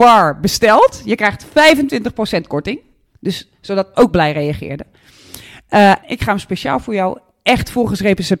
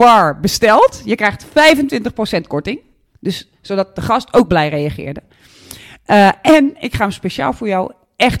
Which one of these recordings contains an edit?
first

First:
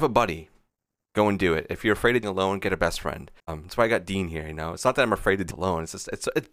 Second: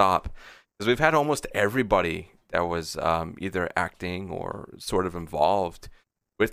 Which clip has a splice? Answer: first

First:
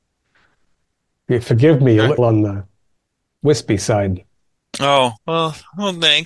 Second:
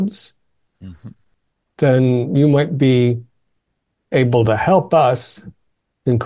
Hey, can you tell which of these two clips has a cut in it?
first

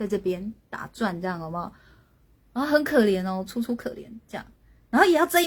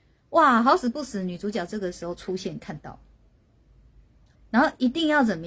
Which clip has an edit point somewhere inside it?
second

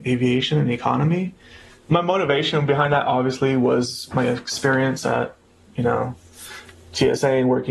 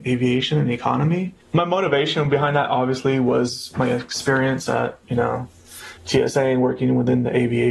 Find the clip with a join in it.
second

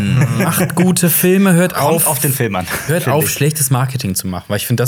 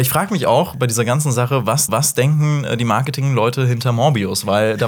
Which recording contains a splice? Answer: second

